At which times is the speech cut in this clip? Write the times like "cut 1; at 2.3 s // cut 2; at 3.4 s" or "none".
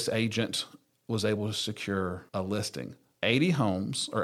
cut 1; at 2.3 s // cut 2; at 3.1 s